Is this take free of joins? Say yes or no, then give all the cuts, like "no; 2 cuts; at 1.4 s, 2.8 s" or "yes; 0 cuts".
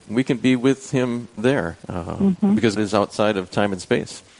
no; 2 cuts; at 1.8 s, 2.8 s